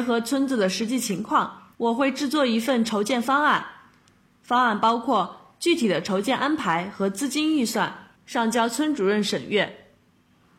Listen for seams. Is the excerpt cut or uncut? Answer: cut